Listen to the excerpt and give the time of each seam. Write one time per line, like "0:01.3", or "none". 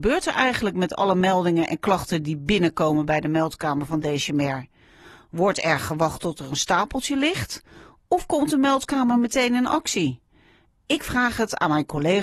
none